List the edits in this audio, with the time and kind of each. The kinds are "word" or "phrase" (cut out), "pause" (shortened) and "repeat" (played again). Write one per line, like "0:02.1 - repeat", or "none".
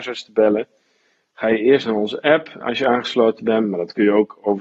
0:02.6 - word